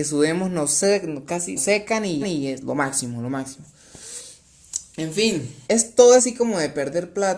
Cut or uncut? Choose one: cut